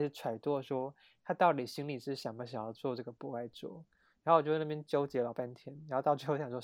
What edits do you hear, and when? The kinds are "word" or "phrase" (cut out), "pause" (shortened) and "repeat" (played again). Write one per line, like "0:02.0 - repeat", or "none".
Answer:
none